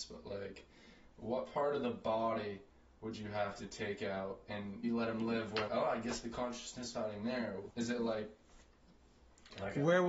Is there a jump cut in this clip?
yes; 4 cuts; at 4.8 s, 5.7 s, 6.9 s, 7.7 s

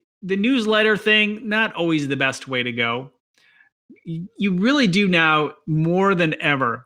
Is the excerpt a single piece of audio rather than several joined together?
yes; 0 cuts

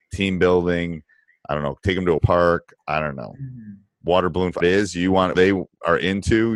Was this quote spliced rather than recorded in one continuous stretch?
yes; 3 cuts; at 2.2 s, 4.6 s, 5.3 s

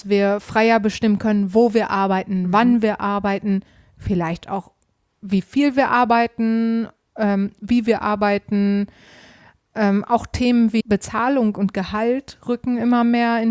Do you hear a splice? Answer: yes; 1 cut; at 10.8 s

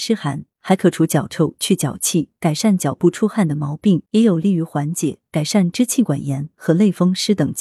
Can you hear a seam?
yes; 1 cut; at 4.1 s

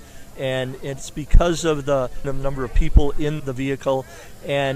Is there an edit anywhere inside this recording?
yes; 2 cuts; at 2.2 s, 3.4 s

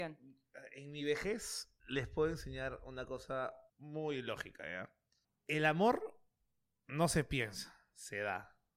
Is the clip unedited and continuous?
no; 3 cuts; at 1.8 s, 3.7 s, 5.2 s

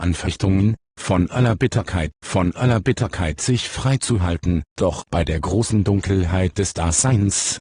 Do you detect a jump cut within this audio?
yes; 3 cuts; at 2.1 s, 4.8 s, 5.1 s

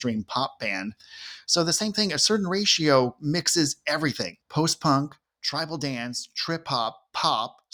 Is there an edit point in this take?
yes; 1 cut; at 4.4 s

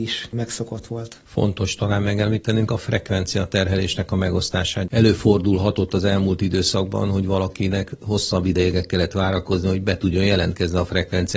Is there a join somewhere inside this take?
yes; 1 cut; at 1.3 s

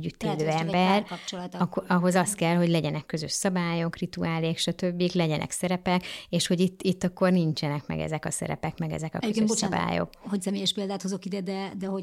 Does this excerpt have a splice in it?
no; 0 cuts

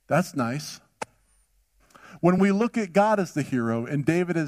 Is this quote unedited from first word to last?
yes; 0 cuts

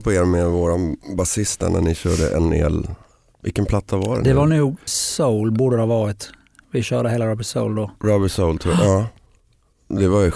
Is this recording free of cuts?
no; 1 cut; at 4.9 s

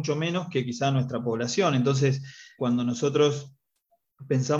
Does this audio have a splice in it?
yes; 1 cut; at 2.6 s

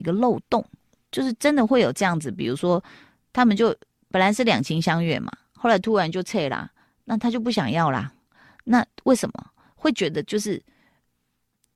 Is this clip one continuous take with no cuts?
yes; 0 cuts

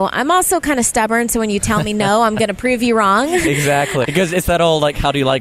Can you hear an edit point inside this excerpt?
yes; 1 cut; at 4.0 s

